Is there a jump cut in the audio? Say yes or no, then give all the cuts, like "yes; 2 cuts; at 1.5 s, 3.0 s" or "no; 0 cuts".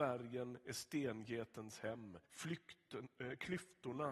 yes; 1 cut; at 2.2 s